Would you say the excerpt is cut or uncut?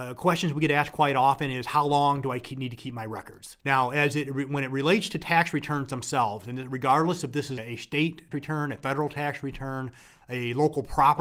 cut